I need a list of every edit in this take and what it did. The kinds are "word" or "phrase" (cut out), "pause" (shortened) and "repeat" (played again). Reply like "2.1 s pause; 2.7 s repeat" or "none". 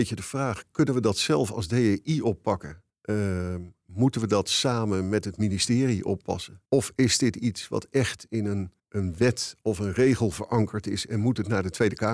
2.9 s pause; 6.7 s pause; 8.8 s pause